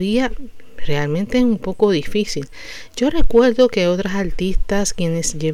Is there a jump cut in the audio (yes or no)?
no